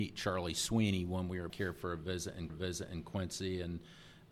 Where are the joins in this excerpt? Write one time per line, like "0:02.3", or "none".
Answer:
0:01.5
0:02.5